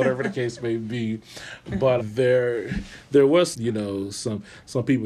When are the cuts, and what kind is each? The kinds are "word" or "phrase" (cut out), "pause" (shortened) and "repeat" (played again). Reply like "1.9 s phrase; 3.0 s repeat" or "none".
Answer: 2.0 s word; 3.5 s word